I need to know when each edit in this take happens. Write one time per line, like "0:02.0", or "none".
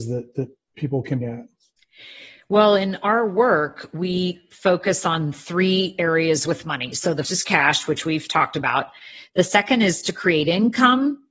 0:01.2
0:07.3